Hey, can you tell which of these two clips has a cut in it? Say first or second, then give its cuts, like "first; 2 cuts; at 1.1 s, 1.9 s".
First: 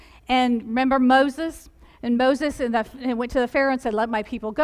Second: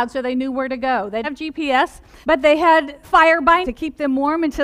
second; 4 cuts; at 1.2 s, 2.2 s, 3.0 s, 3.6 s